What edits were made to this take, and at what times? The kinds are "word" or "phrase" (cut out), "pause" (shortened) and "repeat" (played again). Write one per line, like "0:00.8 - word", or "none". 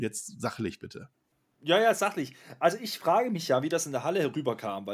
0:01.3 - pause